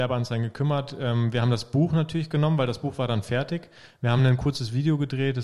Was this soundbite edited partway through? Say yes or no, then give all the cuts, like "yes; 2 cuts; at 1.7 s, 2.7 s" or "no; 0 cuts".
no; 0 cuts